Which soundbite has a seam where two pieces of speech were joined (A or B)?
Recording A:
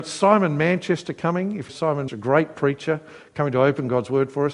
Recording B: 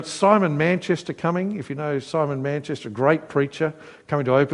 A